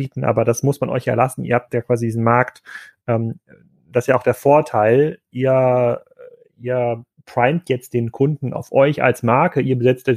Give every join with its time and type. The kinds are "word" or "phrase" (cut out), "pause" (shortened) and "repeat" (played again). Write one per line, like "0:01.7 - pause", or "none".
none